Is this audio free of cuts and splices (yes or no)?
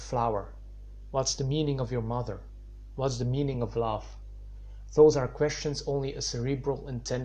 yes